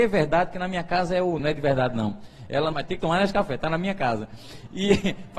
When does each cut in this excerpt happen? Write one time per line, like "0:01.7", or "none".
0:01.4
0:02.7